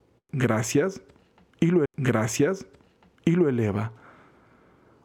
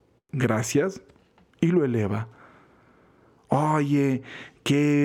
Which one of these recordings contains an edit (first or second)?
first